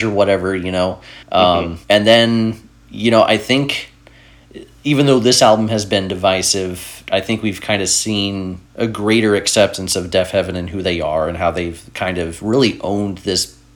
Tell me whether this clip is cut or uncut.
cut